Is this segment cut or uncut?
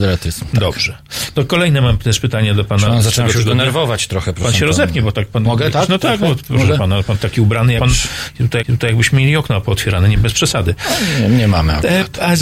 cut